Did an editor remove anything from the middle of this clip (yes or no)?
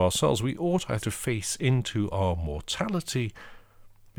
yes